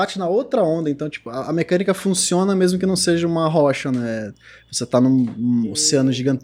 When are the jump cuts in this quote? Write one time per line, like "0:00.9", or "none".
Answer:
none